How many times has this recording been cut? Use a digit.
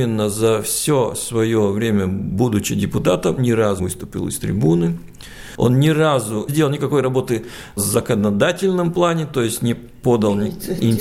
3